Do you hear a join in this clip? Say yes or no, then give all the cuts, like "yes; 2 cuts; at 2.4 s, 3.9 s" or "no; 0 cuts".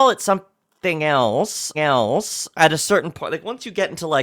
yes; 1 cut; at 1.7 s